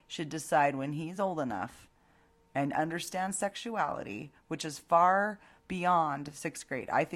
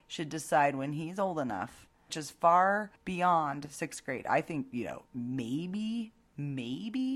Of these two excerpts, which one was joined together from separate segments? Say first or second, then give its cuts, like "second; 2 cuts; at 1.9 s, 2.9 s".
second; 3 cuts; at 2.1 s, 3.0 s, 5.1 s